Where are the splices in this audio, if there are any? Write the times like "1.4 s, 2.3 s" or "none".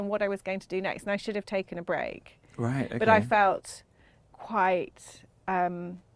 none